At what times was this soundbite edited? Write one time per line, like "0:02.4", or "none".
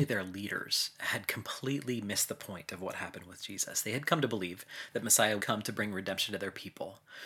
0:05.4

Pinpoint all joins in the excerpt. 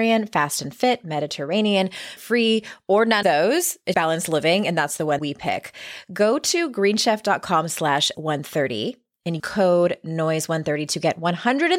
0:02.2
0:03.2
0:03.9
0:05.2
0:08.1
0:09.4

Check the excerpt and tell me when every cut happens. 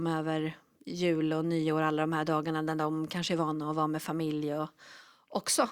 none

